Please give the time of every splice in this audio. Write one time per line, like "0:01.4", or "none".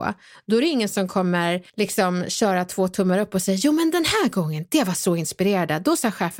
0:01.7